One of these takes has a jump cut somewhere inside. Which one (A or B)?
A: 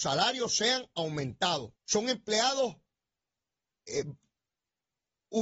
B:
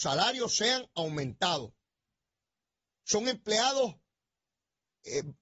A